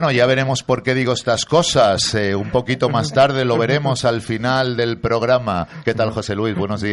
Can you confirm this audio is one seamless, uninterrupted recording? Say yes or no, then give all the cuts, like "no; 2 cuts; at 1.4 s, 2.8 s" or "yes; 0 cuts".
yes; 0 cuts